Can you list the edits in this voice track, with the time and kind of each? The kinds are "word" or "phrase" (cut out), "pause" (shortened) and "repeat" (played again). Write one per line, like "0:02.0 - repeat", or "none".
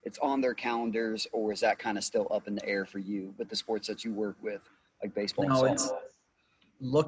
none